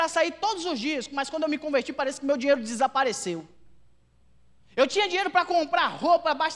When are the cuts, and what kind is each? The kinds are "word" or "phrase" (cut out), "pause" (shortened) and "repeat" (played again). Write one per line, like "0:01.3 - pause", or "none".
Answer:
none